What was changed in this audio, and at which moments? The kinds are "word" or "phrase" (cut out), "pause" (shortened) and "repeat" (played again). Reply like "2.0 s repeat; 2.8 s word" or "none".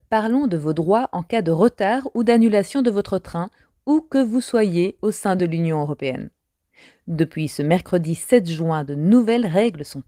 none